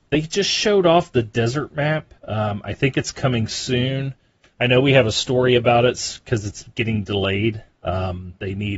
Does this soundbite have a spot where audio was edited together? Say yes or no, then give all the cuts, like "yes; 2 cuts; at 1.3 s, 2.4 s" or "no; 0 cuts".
yes; 1 cut; at 2.2 s